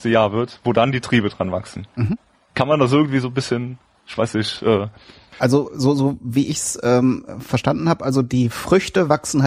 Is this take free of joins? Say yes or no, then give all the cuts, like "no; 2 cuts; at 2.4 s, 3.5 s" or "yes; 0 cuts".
yes; 0 cuts